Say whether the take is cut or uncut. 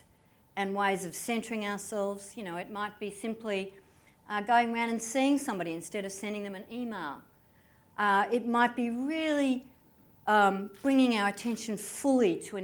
uncut